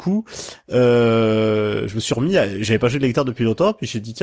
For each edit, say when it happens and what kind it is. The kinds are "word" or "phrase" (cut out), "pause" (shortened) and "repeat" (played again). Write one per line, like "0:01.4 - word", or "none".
none